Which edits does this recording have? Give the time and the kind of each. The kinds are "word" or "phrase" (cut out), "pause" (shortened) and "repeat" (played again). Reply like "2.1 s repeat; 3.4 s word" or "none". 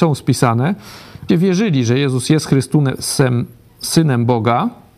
1.3 s word